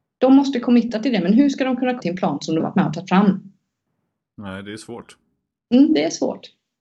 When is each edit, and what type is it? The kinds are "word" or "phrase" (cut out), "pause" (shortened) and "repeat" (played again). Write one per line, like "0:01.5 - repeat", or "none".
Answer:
0:02.0 - word
0:02.6 - word